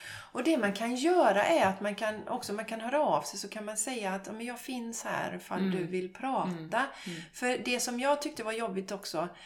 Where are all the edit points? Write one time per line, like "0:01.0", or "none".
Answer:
none